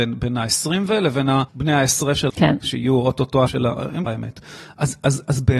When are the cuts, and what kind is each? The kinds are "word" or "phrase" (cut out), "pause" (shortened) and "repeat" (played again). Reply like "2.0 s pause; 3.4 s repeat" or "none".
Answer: 1.5 s pause; 2.3 s word; 3.5 s word; 4.1 s word

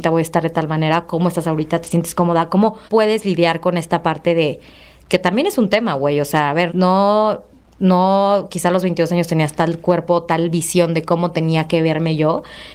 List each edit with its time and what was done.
2.9 s word; 6.7 s word

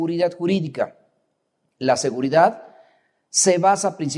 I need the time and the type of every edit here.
none

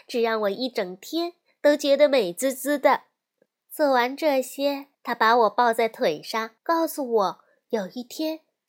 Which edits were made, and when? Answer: 3.5 s pause; 4.9 s pause; 6.6 s pause

